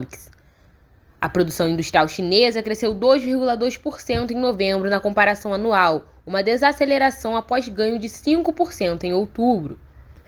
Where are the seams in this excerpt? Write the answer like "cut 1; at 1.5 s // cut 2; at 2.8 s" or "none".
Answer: none